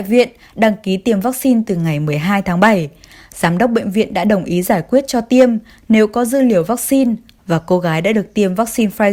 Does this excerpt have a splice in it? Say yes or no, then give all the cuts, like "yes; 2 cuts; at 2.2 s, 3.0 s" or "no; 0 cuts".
no; 0 cuts